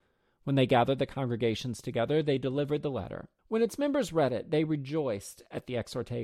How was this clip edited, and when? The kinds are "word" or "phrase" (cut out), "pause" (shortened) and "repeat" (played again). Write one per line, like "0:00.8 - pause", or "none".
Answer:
0:03.4 - pause